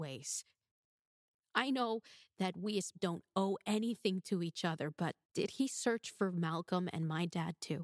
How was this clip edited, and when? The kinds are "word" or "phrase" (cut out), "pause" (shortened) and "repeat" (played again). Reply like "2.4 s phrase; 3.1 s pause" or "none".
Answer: 2.9 s word; 5.2 s pause